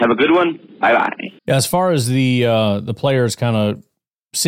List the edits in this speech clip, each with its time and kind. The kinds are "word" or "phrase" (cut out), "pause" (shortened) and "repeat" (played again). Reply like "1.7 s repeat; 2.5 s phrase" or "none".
1.4 s pause